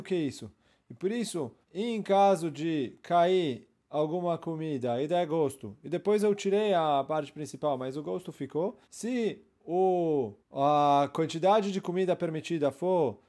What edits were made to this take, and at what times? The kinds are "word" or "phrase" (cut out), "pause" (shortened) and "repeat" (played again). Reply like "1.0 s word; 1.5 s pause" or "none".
1.6 s pause; 8.8 s pause; 10.4 s pause